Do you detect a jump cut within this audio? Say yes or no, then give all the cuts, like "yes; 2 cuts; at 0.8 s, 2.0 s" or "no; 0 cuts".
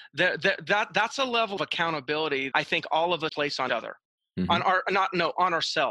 yes; 4 cuts; at 1.6 s, 2.5 s, 3.3 s, 3.7 s